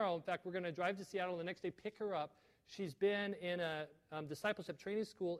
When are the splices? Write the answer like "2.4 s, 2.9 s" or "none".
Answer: none